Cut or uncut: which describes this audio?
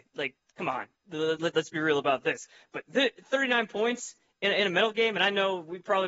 uncut